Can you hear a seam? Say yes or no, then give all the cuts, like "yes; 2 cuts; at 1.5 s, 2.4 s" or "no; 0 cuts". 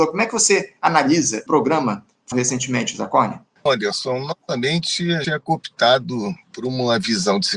yes; 4 cuts; at 1.5 s, 2.3 s, 3.7 s, 5.2 s